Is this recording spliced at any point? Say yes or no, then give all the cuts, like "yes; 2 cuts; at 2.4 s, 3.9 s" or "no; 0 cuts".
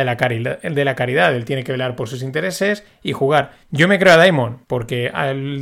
yes; 2 cuts; at 3.6 s, 4.6 s